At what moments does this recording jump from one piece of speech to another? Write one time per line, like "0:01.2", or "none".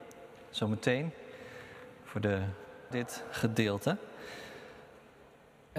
0:02.9